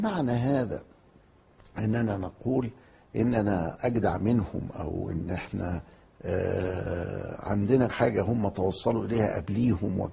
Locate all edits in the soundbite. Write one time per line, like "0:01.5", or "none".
0:07.9